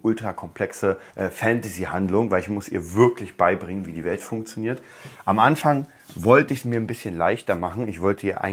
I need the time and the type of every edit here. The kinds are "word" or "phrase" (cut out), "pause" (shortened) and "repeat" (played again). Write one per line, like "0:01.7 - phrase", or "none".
0:01.1 - pause